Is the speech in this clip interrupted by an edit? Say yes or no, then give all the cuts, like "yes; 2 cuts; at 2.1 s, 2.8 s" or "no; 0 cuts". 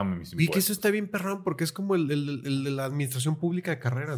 no; 0 cuts